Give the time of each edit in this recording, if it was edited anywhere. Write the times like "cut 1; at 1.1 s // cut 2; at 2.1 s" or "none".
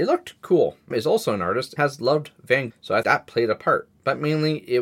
cut 1; at 0.9 s // cut 2; at 1.8 s // cut 3; at 2.7 s // cut 4; at 3.0 s